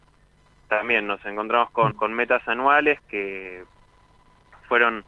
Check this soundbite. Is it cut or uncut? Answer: cut